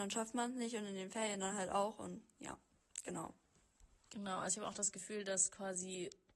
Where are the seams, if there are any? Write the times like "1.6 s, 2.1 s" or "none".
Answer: none